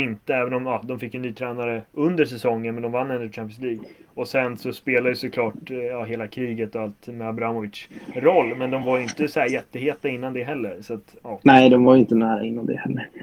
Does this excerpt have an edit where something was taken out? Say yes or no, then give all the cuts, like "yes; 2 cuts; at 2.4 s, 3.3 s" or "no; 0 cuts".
no; 0 cuts